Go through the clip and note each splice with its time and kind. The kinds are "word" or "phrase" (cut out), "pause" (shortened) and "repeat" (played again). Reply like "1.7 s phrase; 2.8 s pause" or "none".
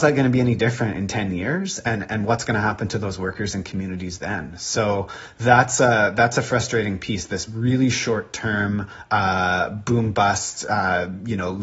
none